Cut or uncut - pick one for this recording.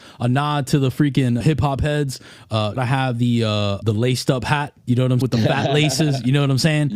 cut